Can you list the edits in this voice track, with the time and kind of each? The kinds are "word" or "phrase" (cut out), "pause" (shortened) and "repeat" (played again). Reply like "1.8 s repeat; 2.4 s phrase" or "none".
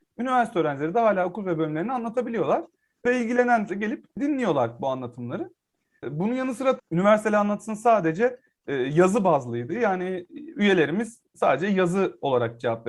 3.7 s word; 6.8 s word